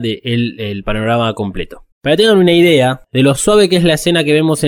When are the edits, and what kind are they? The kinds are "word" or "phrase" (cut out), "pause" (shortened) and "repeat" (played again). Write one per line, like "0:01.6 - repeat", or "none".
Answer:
0:01.9 - pause